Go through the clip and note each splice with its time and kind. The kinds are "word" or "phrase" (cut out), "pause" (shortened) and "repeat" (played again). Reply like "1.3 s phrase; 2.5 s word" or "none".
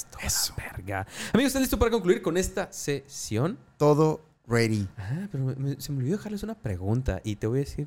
none